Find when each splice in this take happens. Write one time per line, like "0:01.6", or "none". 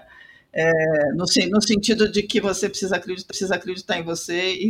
0:03.3

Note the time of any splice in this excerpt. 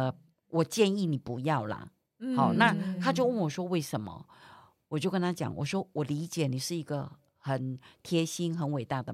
none

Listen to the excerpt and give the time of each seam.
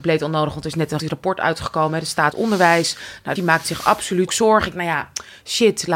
0:01.0
0:02.3
0:03.4
0:04.3
0:04.7

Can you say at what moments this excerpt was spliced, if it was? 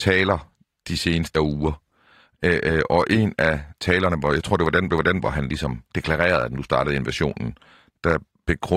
0:01.3
0:04.9
0:05.9

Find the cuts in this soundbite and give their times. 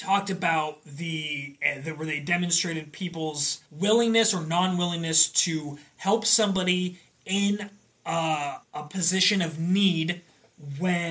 0:03.7
0:08.6

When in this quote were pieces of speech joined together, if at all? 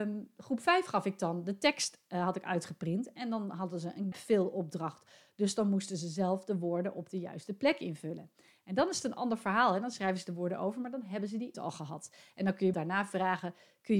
0:04.1
0:11.5
0:12.7

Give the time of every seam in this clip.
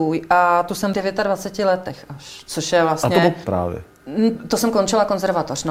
0:00.9
0:03.4

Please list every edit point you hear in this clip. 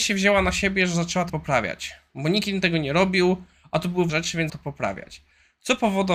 0:01.3
0:04.1
0:04.5

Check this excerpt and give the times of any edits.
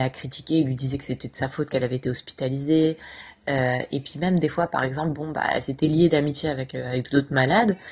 none

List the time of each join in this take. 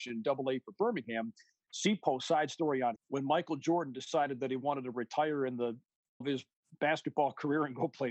0:03.0
0:06.2

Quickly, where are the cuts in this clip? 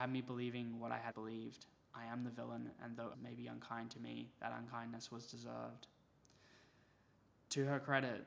0:01.1
0:03.1

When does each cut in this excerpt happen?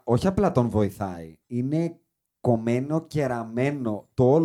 0:01.4

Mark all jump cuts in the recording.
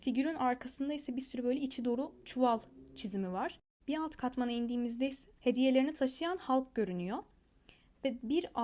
0:02.2
0:05.4

